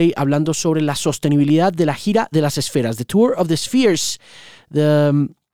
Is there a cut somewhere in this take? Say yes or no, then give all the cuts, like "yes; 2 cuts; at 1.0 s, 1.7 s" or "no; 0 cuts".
no; 0 cuts